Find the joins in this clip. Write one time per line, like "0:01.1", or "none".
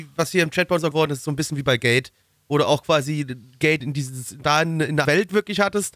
0:00.9
0:03.8
0:04.4
0:05.0